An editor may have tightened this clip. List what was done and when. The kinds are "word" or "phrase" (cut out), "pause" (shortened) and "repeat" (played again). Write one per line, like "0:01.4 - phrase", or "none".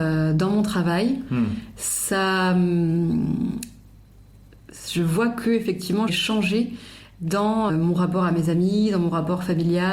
0:06.1 - word
0:07.7 - word